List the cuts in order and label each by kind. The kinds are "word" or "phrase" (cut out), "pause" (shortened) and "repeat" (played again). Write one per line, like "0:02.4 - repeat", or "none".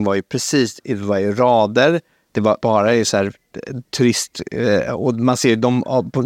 0:02.6 - word